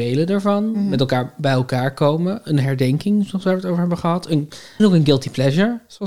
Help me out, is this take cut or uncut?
cut